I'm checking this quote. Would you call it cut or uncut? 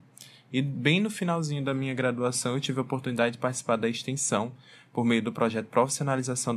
uncut